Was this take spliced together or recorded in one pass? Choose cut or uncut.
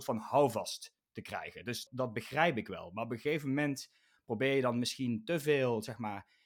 uncut